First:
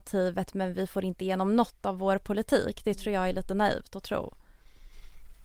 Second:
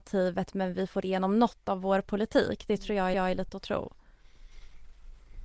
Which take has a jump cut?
second; 3 cuts; at 1.0 s, 3.1 s, 3.5 s

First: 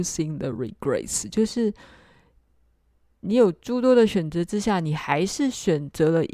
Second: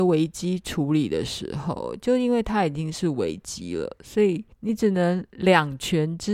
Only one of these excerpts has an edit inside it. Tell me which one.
second; 1 cut; at 4.5 s

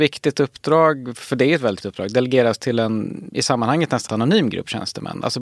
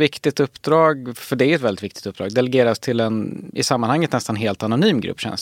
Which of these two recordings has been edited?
first; 2 cuts; at 1.8 s, 4.1 s

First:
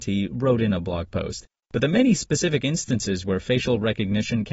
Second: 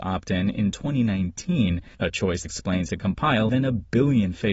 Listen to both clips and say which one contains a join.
second; 4 cuts; at 1.9 s, 2.4 s, 2.9 s, 3.5 s

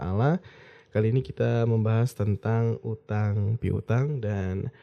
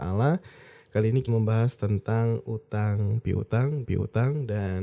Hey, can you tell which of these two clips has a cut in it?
second; 2 cuts; at 1.3 s, 3.8 s

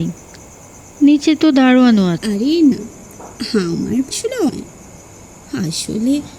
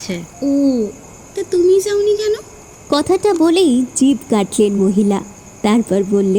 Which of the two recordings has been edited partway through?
first; 4 cuts; at 2.2 s, 2.7 s, 4.1 s, 4.5 s

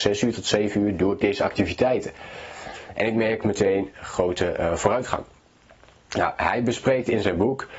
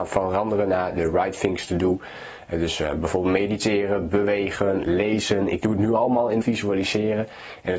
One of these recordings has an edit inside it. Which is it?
second; 1 cut; at 6.4 s

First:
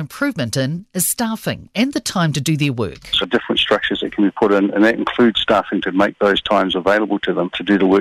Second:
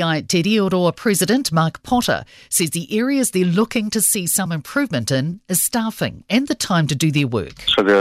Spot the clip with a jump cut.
first; 1 cut; at 3.2 s

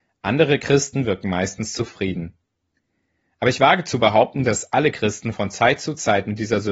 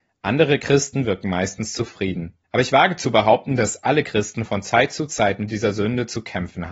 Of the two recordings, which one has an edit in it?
second; 1 cut; at 2.4 s

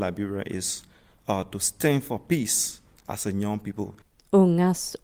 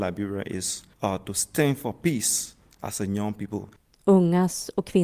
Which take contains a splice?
second; 1 cut; at 0.9 s

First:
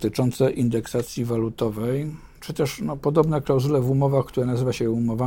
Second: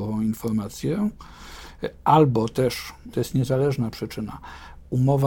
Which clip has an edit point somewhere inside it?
second; 1 cut; at 3.1 s

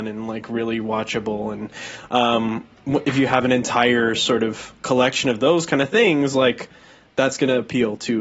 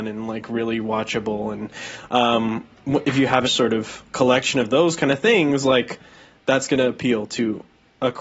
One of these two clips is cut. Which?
second; 1 cut; at 3.4 s

